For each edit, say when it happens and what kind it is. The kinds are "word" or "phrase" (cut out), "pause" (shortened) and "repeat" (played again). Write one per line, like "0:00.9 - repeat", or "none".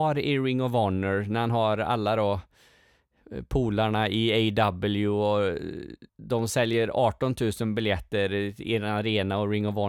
0:06.1 - pause